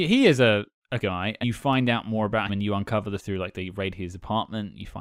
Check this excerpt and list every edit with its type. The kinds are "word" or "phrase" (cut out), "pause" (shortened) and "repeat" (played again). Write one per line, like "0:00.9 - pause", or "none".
0:01.0 - word
0:01.4 - word
0:02.5 - word
0:03.2 - word